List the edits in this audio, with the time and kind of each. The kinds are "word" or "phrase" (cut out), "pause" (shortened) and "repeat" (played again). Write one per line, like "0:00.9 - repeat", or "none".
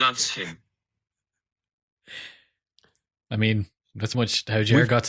0:04.1 - word